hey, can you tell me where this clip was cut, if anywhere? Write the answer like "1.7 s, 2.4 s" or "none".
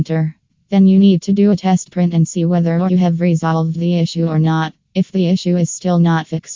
2.9 s, 4.8 s